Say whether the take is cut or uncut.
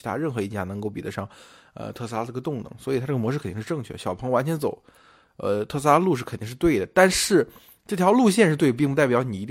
uncut